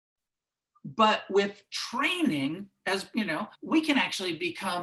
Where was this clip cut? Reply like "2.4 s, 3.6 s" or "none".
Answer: 3.5 s